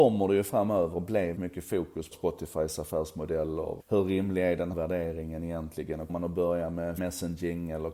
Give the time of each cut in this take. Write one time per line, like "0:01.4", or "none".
0:00.9
0:01.4
0:02.1
0:03.8
0:04.7
0:06.1
0:07.0